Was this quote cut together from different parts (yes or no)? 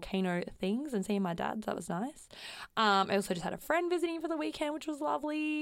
no